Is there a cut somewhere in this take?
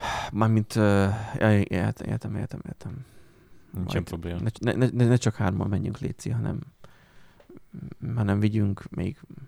no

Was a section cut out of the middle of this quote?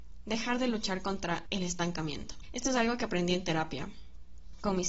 no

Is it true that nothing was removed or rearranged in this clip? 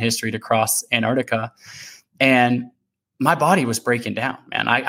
yes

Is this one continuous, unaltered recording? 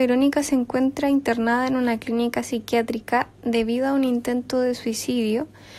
yes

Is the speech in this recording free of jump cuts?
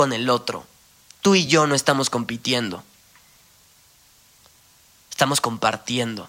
yes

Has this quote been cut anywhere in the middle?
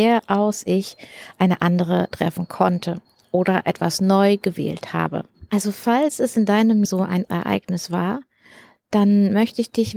yes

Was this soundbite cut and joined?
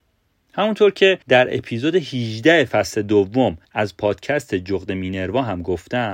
yes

